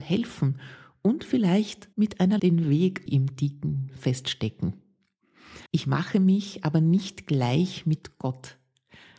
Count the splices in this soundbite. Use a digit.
5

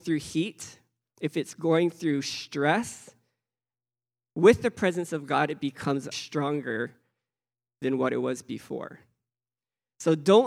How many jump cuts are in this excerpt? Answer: 1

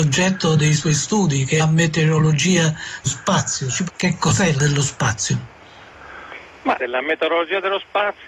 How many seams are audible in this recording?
5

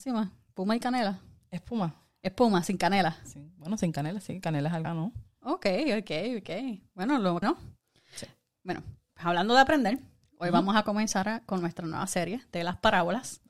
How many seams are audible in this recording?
2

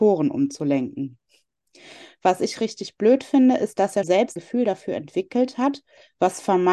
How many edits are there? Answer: 2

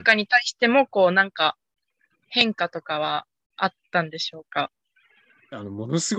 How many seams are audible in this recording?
0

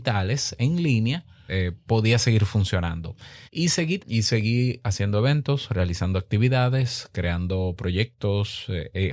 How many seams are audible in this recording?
3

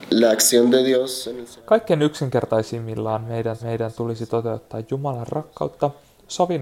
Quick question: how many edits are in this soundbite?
2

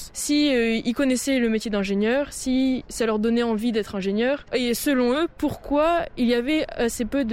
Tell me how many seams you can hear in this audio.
0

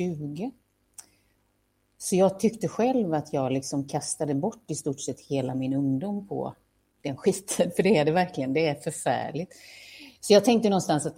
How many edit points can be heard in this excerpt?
0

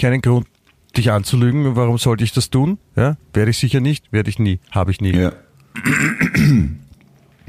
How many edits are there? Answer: 1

